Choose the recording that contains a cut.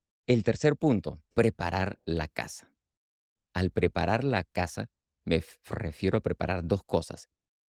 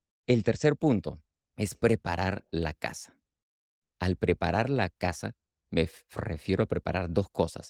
first; 1 cut; at 1.3 s

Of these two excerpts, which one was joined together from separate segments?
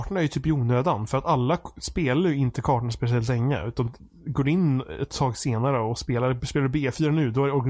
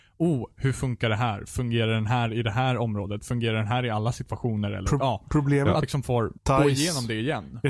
second; 2 cuts; at 5.8 s, 6.4 s

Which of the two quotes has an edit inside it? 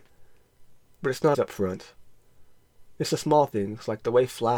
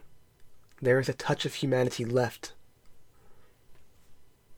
first; 1 cut; at 1.3 s

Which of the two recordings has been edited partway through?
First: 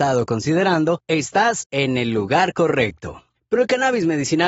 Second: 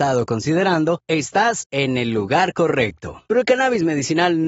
second; 1 cut; at 3.3 s

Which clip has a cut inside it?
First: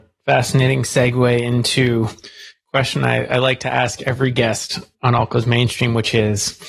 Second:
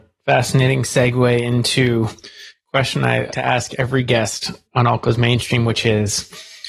second; 1 cut; at 3.3 s

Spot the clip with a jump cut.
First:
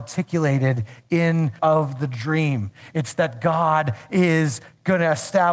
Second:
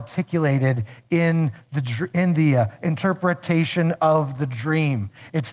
first; 1 cut; at 1.6 s

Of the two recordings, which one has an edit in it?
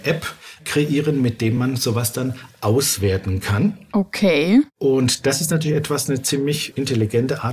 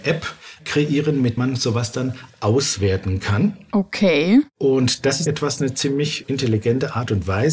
second; 2 cuts; at 1.4 s, 5.3 s

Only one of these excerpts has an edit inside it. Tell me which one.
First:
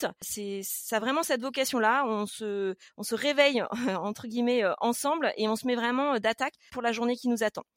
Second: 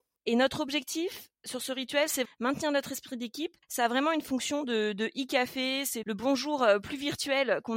second; 4 cuts; at 1.3 s, 2.2 s, 3.6 s, 6.0 s

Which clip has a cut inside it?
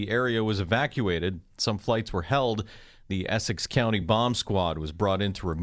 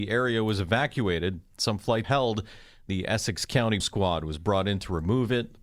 second; 2 cuts; at 2.0 s, 3.8 s

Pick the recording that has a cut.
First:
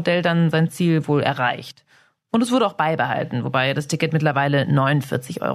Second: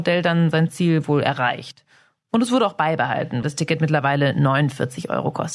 second; 1 cut; at 3.4 s

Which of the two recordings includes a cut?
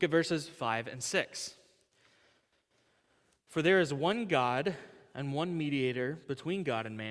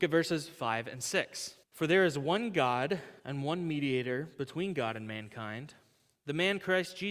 second; 2 cuts; at 1.6 s, 3.2 s

